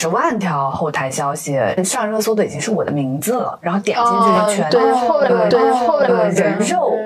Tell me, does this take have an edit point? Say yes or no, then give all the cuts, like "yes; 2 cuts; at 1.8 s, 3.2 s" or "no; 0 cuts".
yes; 1 cut; at 5.5 s